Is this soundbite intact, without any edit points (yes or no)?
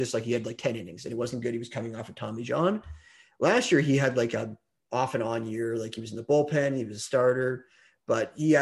yes